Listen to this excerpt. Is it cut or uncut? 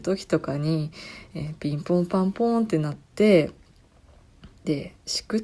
uncut